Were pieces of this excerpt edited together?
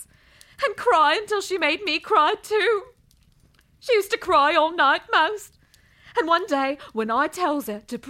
no; 0 cuts

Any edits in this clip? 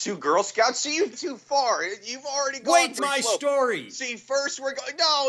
yes; 2 cuts; at 1.1 s, 3.0 s

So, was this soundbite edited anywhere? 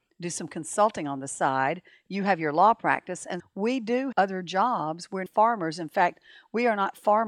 yes; 3 cuts; at 3.4 s, 4.1 s, 5.3 s

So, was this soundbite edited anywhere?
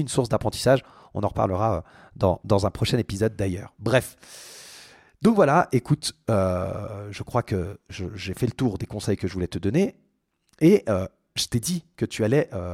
no; 0 cuts

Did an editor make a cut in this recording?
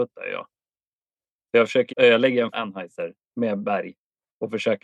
yes; 2 cuts; at 1.9 s, 2.5 s

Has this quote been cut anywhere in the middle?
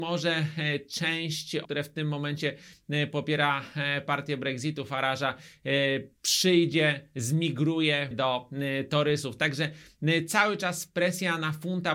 yes; 3 cuts; at 1.6 s, 6.2 s, 8.1 s

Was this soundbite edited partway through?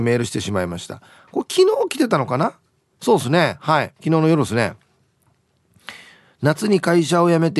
no; 0 cuts

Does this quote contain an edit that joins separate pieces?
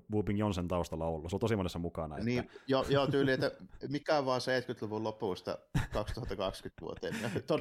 no; 0 cuts

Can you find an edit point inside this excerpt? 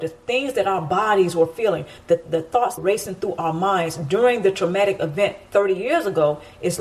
yes; 2 cuts; at 2.2 s, 2.8 s

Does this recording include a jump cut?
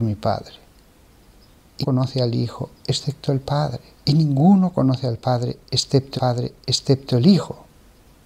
yes; 3 cuts; at 1.8 s, 3.9 s, 6.2 s

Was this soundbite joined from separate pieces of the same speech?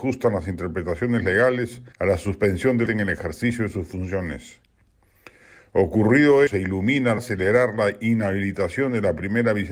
yes; 4 cuts; at 1.9 s, 2.9 s, 6.5 s, 7.2 s

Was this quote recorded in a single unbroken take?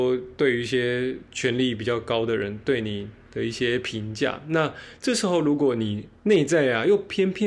no; 1 cut; at 6.2 s

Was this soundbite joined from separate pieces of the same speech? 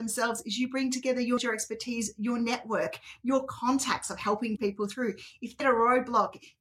yes; 3 cuts; at 1.4 s, 4.6 s, 5.6 s

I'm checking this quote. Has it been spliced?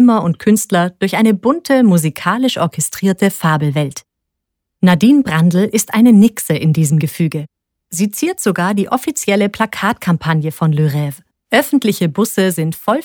yes; 1 cut; at 11.3 s

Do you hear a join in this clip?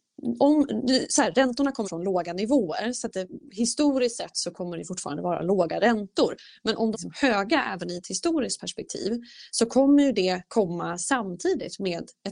yes; 2 cuts; at 1.8 s, 6.9 s

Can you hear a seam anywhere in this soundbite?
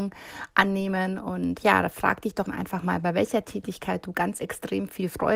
yes; 1 cut; at 2.5 s

